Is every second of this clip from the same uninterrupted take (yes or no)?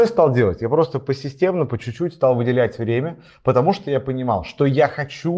yes